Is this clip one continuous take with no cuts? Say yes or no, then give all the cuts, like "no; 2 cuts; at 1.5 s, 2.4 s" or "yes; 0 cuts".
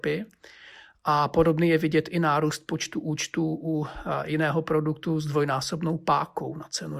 yes; 0 cuts